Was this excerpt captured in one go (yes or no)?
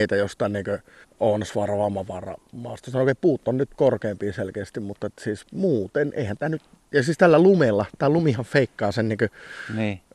no